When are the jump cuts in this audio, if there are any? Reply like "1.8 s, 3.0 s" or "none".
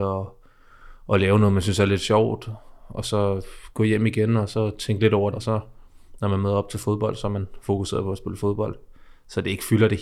5.3 s